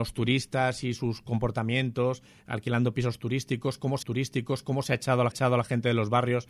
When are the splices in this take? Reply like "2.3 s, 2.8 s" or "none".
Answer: 4.0 s, 5.3 s